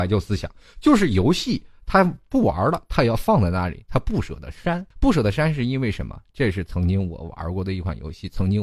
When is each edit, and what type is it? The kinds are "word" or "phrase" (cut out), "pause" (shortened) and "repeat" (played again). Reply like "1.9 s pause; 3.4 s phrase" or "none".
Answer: 4.9 s pause